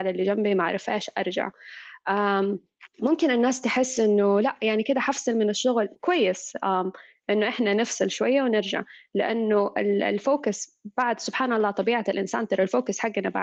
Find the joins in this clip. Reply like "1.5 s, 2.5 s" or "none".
2.9 s, 6.0 s